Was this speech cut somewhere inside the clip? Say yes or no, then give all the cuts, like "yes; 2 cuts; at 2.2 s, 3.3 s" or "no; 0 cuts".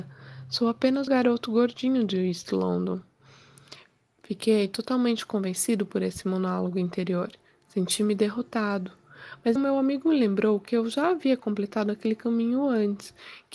yes; 2 cuts; at 1.1 s, 9.6 s